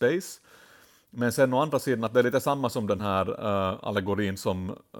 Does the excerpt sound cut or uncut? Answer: uncut